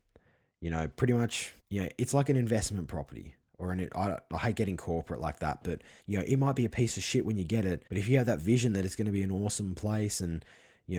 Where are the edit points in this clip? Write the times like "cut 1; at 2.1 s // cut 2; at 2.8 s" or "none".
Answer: cut 1; at 1.6 s // cut 2; at 6.0 s // cut 3; at 7.9 s

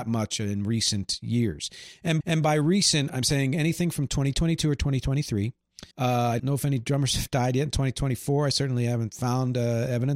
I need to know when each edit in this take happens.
cut 1; at 2.2 s // cut 2; at 3.1 s // cut 3; at 5.9 s // cut 4; at 6.4 s

